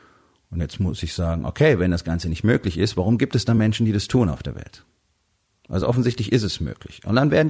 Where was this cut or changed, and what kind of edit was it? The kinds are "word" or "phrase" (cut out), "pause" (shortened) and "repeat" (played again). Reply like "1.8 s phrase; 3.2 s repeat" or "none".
none